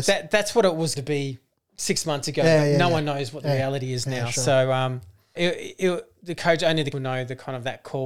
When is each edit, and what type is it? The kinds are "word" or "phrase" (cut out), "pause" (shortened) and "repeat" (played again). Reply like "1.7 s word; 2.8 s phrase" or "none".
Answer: 1.0 s word; 5.4 s word; 6.9 s word